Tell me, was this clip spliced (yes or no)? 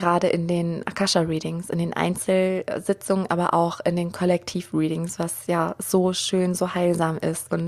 no